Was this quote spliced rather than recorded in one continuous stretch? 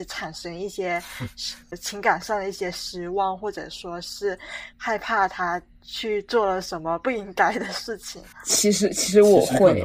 yes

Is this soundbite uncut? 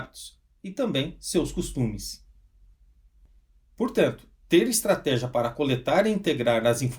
yes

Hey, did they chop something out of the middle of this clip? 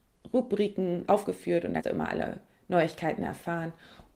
yes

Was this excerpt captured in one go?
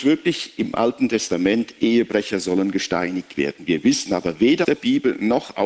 no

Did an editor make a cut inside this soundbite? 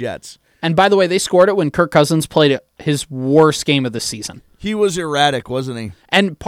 no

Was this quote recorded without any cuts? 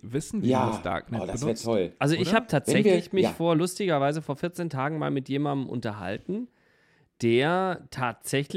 yes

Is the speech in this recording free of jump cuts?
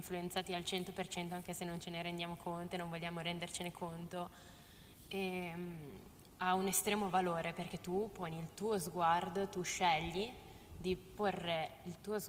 yes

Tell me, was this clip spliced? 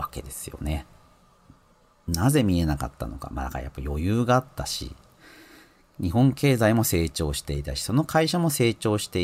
no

